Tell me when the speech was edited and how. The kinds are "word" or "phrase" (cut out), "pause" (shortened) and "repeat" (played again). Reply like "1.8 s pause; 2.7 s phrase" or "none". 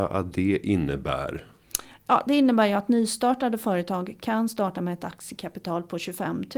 none